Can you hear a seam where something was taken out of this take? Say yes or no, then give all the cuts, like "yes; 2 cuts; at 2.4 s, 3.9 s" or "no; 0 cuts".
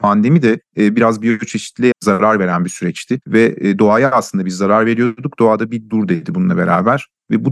yes; 2 cuts; at 1.9 s, 3.2 s